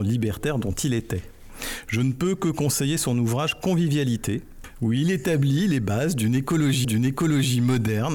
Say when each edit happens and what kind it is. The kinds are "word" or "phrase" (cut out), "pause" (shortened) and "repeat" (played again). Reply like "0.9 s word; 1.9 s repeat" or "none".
6.8 s repeat